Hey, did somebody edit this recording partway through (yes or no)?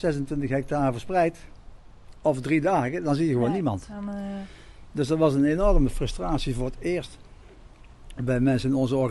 no